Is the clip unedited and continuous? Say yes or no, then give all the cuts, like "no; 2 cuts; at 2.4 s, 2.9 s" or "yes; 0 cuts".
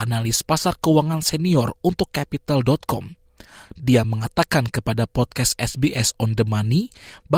yes; 0 cuts